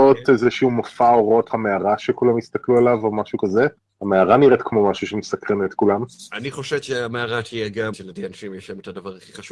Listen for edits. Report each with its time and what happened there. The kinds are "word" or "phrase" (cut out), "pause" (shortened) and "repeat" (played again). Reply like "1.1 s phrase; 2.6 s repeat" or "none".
1.5 s word; 3.8 s pause; 7.9 s word